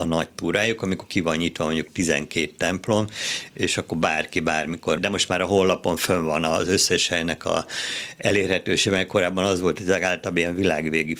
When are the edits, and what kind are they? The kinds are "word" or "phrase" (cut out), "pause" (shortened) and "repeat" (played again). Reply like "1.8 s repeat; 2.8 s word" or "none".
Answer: 5.0 s word